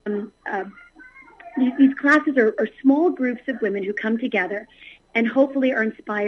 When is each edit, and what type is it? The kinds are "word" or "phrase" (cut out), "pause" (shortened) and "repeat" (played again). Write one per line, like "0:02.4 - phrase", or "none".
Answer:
none